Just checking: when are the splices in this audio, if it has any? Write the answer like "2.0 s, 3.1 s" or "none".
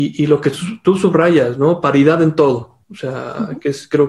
2.8 s